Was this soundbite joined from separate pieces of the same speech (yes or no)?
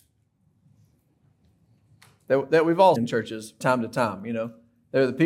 yes